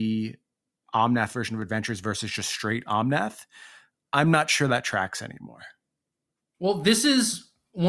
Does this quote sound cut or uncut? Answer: uncut